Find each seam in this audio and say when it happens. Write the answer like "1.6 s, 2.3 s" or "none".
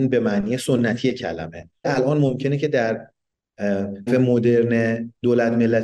1.8 s, 4.1 s